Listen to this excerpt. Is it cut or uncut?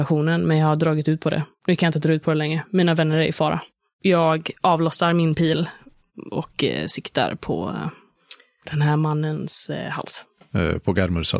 uncut